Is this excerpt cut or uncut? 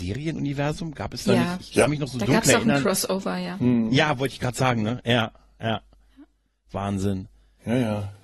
uncut